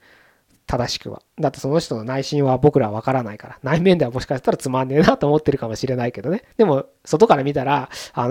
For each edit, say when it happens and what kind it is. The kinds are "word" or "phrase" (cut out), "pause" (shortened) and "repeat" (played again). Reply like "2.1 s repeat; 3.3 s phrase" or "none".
6.5 s pause

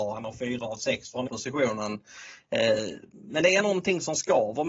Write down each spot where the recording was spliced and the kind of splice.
1.3 s word; 3.6 s word

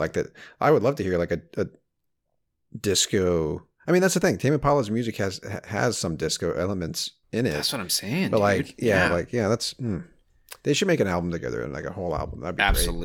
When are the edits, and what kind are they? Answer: 3.8 s pause

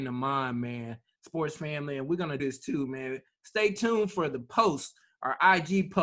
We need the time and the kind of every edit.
2.4 s word

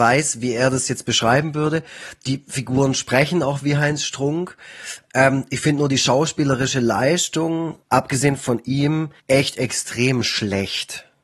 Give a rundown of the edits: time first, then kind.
7.8 s pause; 9.2 s pause

